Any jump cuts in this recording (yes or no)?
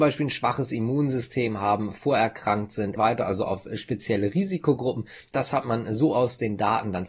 yes